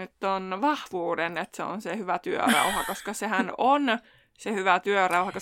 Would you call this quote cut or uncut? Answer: uncut